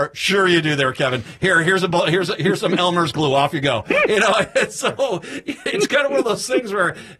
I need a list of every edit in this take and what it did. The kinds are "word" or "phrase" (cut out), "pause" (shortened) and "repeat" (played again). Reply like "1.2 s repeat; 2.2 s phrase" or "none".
none